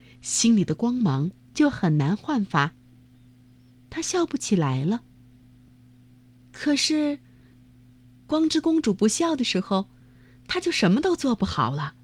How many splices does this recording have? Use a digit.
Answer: 0